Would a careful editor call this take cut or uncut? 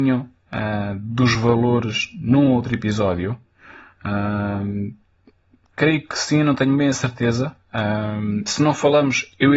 uncut